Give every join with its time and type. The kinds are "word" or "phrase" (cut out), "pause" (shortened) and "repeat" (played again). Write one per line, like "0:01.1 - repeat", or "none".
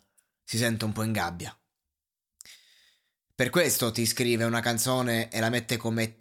none

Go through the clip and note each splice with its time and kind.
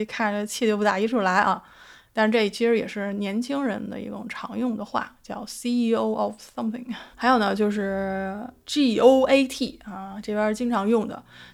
0:07.1 - pause

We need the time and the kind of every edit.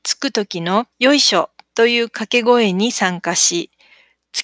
0:00.9 - pause

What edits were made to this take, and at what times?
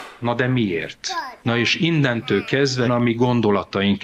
0:01.4 - pause
0:02.8 - word

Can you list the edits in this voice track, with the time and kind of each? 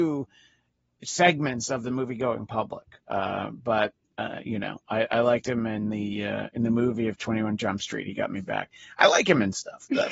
none

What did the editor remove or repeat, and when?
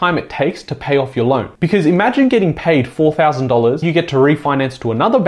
0:03.8 - word

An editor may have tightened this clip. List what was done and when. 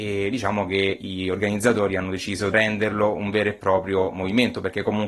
0:02.5 - phrase

